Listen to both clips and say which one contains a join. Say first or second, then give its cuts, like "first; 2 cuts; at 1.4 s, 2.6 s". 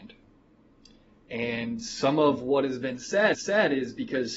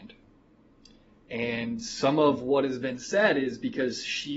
first; 1 cut; at 3.3 s